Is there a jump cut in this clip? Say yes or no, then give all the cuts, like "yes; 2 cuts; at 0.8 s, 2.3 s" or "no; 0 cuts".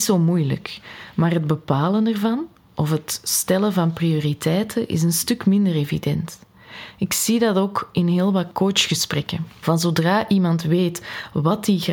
no; 0 cuts